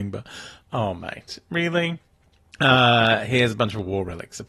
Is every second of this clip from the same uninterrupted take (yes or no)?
yes